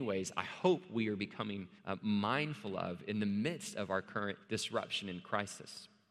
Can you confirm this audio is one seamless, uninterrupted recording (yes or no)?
no